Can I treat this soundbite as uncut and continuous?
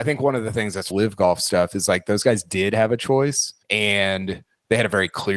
no; 2 cuts; at 0.9 s, 3.6 s

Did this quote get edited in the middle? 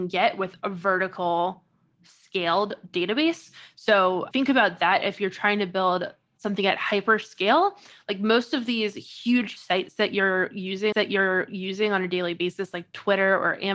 yes; 3 cuts; at 4.3 s, 9.6 s, 10.9 s

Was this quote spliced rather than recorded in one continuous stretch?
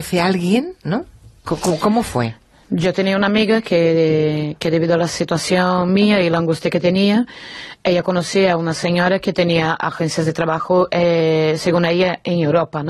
no; 0 cuts

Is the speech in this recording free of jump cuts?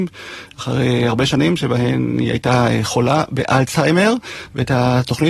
yes; 0 cuts

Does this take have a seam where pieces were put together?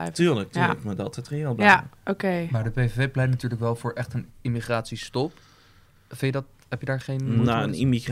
no; 0 cuts

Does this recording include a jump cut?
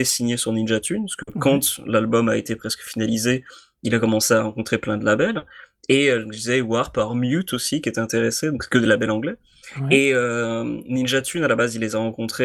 no; 0 cuts

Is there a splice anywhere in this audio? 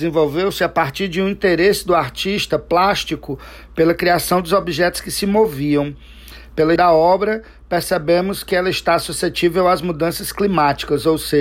yes; 1 cut; at 6.8 s

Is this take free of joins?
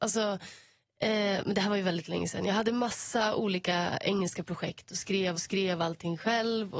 no; 1 cut; at 5.3 s

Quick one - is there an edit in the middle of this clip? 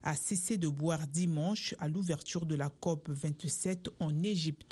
no; 0 cuts

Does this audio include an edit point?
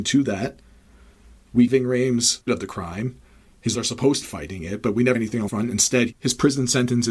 yes; 6 cuts; at 1.7 s, 2.5 s, 3.7 s, 4.2 s, 5.1 s, 5.5 s

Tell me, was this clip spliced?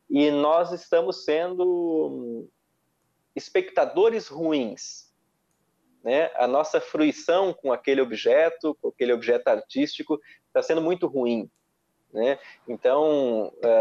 no; 0 cuts

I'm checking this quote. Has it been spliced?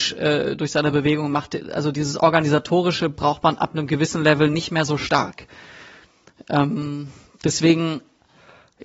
no; 0 cuts

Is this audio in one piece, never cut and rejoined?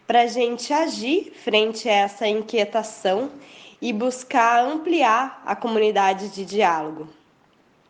yes; 0 cuts

